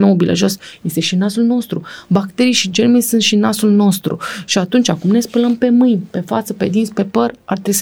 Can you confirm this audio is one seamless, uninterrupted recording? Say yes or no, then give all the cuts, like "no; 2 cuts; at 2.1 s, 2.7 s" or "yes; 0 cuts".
yes; 0 cuts